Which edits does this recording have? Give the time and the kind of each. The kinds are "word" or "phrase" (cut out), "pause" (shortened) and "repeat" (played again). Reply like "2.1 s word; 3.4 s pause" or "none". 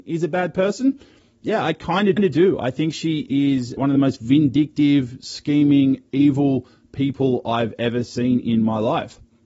2.2 s repeat; 3.8 s word